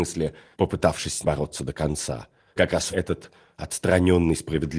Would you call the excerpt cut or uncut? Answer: cut